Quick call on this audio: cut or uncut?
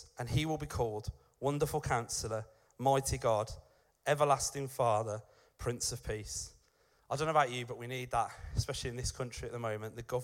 uncut